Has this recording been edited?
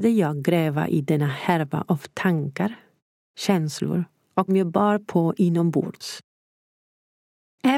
yes; 1 cut; at 4.5 s

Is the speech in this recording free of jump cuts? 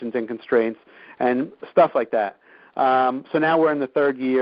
yes; 0 cuts

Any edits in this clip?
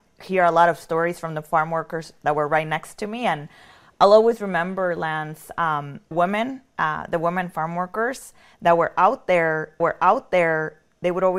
yes; 2 cuts; at 6.1 s, 9.8 s

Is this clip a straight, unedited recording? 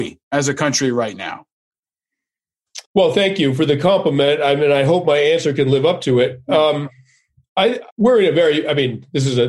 no; 2 cuts; at 2.9 s, 7.9 s

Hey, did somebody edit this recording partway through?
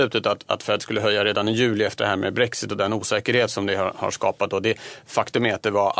no; 0 cuts

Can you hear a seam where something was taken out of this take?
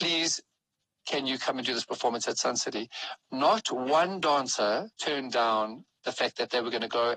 yes; 1 cut; at 4.9 s

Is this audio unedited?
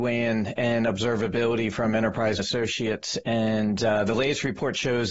no; 1 cut; at 2.4 s

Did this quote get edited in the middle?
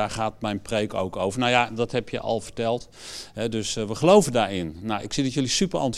no; 0 cuts

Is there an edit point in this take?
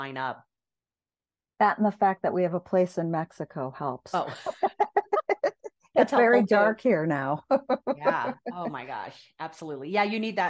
no; 0 cuts

